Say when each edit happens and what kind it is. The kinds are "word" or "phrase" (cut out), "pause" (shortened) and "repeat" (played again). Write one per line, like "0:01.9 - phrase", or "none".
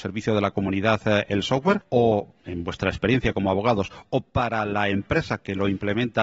none